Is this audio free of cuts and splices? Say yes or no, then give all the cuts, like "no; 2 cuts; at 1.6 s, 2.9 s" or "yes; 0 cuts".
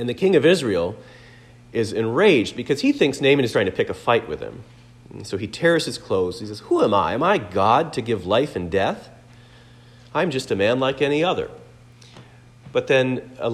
no; 1 cut; at 3.5 s